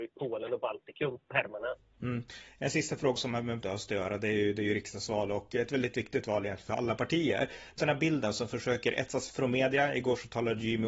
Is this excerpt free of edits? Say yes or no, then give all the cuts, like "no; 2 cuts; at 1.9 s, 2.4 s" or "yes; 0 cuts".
no; 4 cuts; at 3.2 s, 3.6 s, 7.8 s, 9.3 s